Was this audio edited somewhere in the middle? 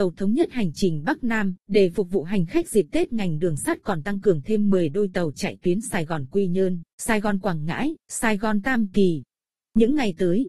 yes; 3 cuts; at 1.6 s, 6.9 s, 8.0 s

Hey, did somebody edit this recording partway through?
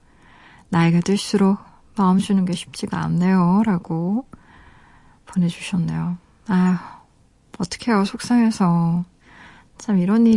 no; 0 cuts

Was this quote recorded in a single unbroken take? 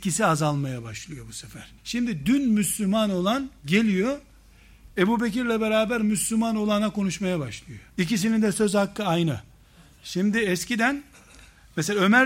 no; 3 cuts; at 1.8 s, 4.9 s, 7.9 s

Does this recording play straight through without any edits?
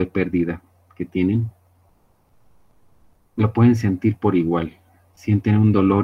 yes; 0 cuts

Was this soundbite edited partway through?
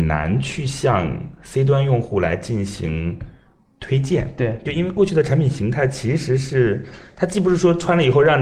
no; 0 cuts

